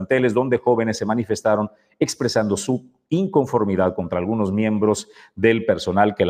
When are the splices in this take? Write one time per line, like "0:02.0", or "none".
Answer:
none

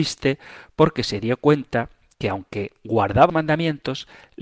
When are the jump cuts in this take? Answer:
0:03.3

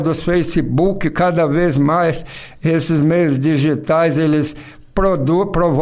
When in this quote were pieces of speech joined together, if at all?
none

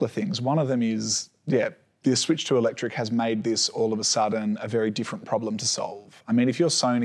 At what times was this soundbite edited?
none

